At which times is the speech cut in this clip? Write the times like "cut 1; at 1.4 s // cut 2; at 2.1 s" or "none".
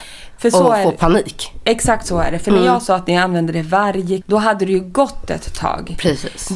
cut 1; at 4.2 s